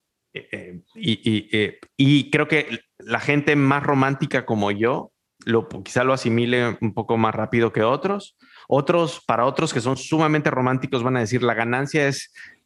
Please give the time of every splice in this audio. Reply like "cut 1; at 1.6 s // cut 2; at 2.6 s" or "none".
none